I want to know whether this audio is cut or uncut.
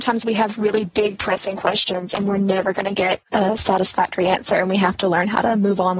uncut